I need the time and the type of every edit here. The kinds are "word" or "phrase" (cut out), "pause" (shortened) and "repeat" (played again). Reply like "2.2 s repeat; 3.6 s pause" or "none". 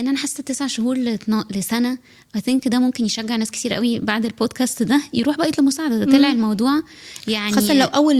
none